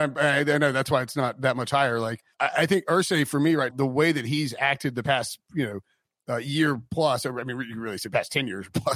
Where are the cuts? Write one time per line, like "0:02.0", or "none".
0:02.3
0:03.7